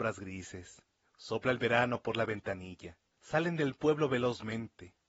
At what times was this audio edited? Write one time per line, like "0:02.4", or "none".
0:01.0
0:03.1